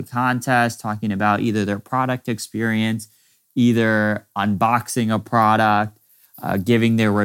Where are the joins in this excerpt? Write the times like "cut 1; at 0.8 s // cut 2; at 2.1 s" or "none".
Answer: none